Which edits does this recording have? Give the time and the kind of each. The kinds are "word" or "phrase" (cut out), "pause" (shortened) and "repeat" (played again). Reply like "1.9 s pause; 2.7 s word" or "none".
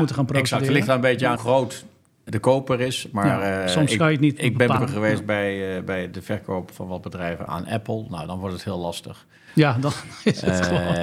1.4 s word; 2.3 s word; 4.8 s word; 6.1 s word; 6.7 s word; 7.5 s word